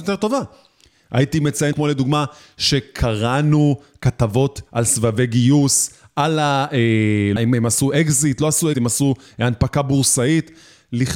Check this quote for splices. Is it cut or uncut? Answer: cut